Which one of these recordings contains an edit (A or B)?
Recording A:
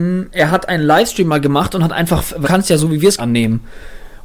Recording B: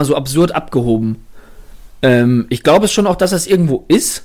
A